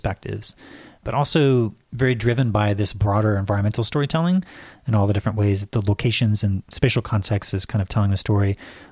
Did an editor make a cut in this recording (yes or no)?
no